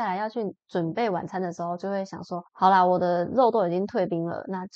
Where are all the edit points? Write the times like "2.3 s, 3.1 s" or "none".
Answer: 2.5 s